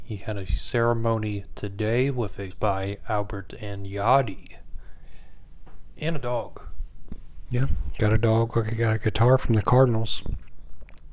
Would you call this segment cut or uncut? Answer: cut